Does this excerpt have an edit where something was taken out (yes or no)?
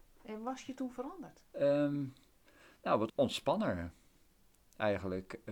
yes